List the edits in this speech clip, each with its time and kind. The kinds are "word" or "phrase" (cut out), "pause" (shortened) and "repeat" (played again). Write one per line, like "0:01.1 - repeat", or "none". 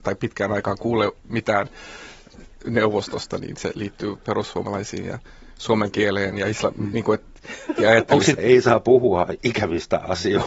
0:07.8 - word
0:08.4 - phrase